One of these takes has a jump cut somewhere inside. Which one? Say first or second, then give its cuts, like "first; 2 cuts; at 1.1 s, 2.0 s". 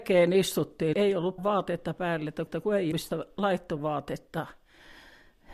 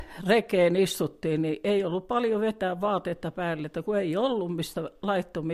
first; 5 cuts; at 0.9 s, 1.4 s, 2.5 s, 2.9 s, 3.8 s